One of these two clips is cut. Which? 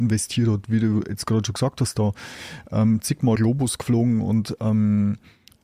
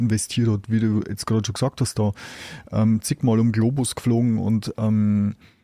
first; 1 cut; at 3.4 s

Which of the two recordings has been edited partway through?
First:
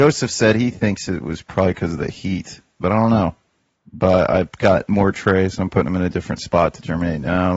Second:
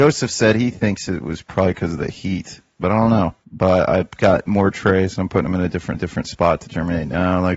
second; 2 cuts; at 3.4 s, 5.9 s

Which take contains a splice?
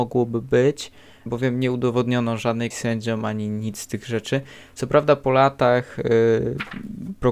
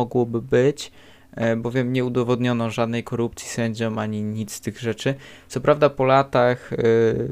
first; 2 cuts; at 1.3 s, 2.7 s

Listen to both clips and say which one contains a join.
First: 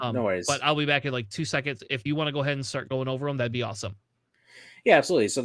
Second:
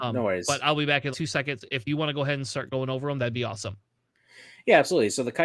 second; 1 cut; at 1.1 s

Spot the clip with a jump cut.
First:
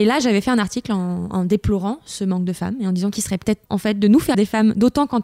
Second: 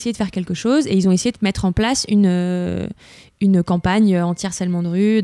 first; 2 cuts; at 3.7 s, 4.3 s

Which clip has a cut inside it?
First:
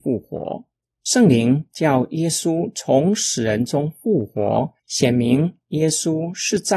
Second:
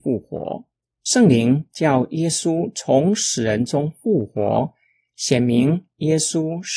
first; 1 cut; at 4.8 s

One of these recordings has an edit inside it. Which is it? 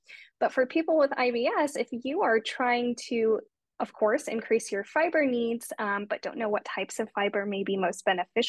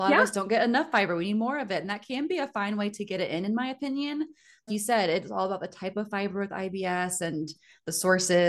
second; 1 cut; at 4.7 s

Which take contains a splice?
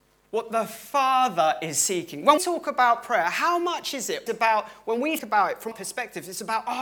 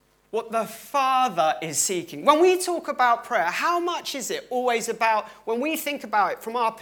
first; 4 cuts; at 2.4 s, 4.3 s, 5.2 s, 5.7 s

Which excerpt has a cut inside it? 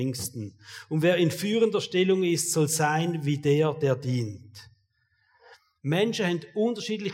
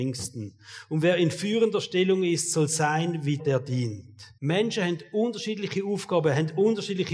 second; 2 cuts; at 3.4 s, 4.4 s

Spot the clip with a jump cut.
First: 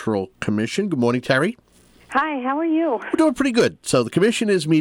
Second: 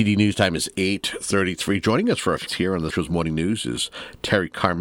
second; 2 cuts; at 2.5 s, 2.9 s

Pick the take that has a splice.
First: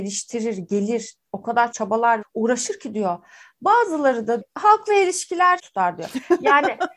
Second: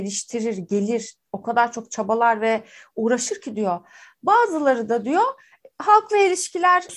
first; 4 cuts; at 1.7 s, 2.2 s, 4.4 s, 5.6 s

